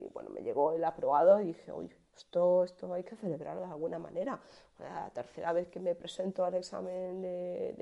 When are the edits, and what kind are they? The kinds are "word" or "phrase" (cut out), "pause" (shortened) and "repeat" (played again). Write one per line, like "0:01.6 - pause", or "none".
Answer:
none

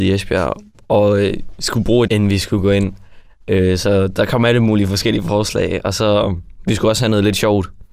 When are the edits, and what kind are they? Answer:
0:02.1 - word

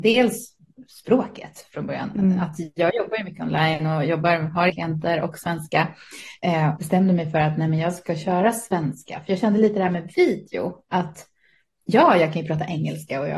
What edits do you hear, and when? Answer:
0:04.7 - word
0:06.8 - word

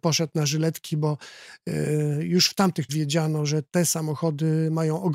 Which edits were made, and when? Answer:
0:02.9 - word

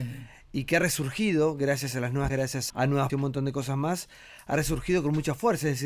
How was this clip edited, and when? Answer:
0:02.3 - word
0:02.7 - word
0:03.1 - word

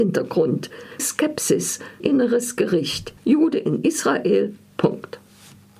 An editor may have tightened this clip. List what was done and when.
0:01.0 - word
0:02.0 - word
0:03.2 - pause

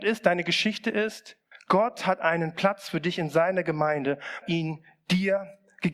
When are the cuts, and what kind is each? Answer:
0:01.5 - pause
0:04.4 - phrase

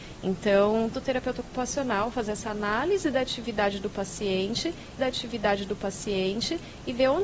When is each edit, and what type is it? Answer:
0:00.9 - phrase
0:05.0 - repeat

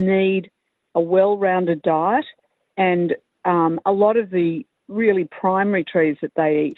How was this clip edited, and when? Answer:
none

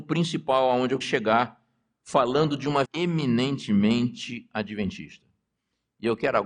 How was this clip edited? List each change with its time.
0:01.0 - word
0:02.8 - word

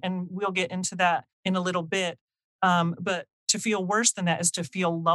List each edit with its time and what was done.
0:01.3 - pause

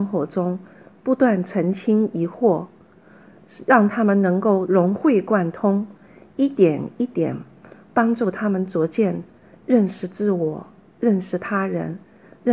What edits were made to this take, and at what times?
none

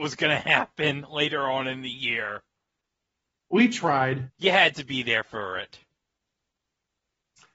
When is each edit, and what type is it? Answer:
0:04.3 - pause

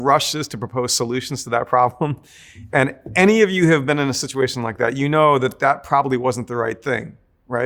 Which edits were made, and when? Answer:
none

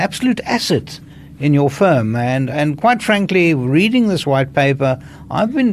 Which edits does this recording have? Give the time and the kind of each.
none

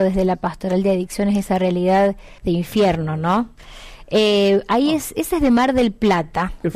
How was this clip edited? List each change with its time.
0:02.4 - pause

